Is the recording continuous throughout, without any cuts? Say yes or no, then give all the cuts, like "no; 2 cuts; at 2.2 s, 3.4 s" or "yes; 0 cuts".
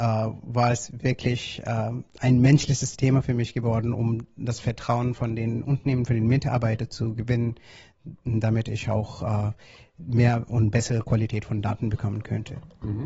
yes; 0 cuts